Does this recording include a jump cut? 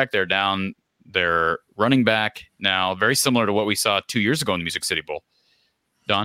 no; 0 cuts

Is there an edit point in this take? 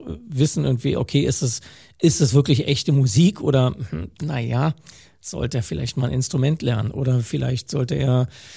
no; 0 cuts

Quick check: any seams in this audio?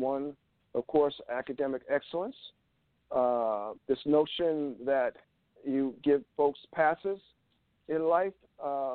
yes; 3 cuts; at 3.8 s, 5.6 s, 6.3 s

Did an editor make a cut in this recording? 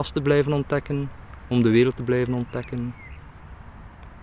no; 0 cuts

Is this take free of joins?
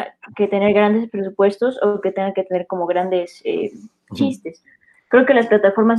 yes; 0 cuts

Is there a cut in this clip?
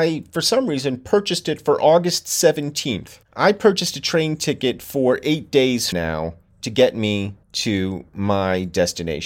yes; 3 cuts; at 3.2 s, 5.9 s, 7.4 s

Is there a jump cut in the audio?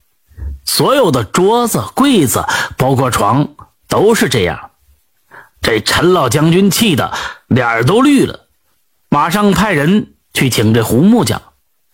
no; 0 cuts

